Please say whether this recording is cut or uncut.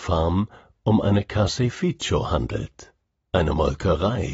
uncut